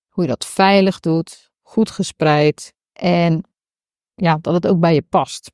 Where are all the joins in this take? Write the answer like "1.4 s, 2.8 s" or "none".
2.8 s